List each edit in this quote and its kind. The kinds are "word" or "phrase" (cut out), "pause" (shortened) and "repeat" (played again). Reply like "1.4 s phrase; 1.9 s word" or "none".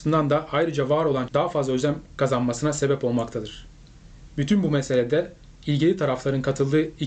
1.3 s word